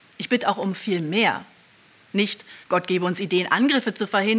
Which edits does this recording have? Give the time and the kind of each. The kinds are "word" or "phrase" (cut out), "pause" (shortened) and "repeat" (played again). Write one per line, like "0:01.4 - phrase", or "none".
0:02.6 - pause

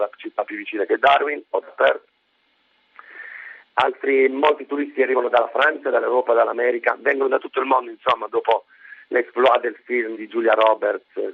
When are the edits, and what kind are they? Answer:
0:10.1 - word

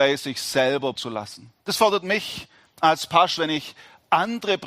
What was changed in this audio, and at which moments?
0:01.0 - word
0:01.6 - pause
0:03.4 - word

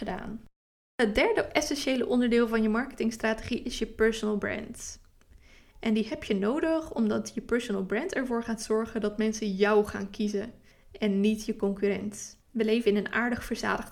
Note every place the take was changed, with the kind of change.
0:10.7 - pause
0:12.4 - pause

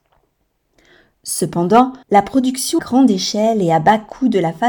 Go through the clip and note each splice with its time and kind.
0:02.0 - pause
0:02.8 - word

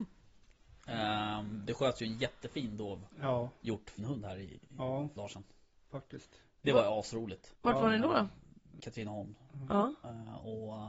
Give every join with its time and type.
0:03.1 - pause
0:04.0 - word
0:04.7 - pause
0:05.2 - phrase
0:07.6 - pause
0:08.8 - phrase

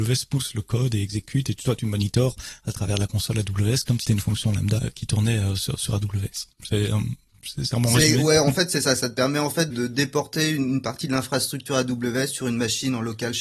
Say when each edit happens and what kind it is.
0:04.1 - word
0:04.8 - word
0:06.5 - pause
0:09.7 - word

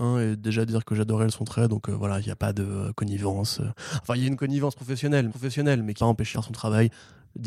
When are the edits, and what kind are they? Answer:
0:05.3 - repeat
0:06.0 - word
0:06.3 - word

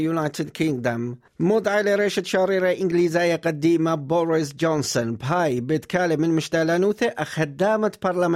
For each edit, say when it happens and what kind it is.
none

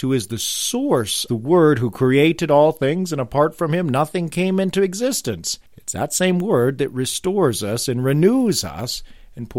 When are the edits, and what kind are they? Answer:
0:01.3 - phrase
0:05.7 - pause

